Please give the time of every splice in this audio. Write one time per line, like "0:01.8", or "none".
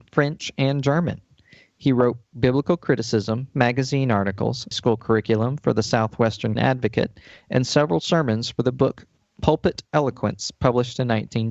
0:04.7
0:06.6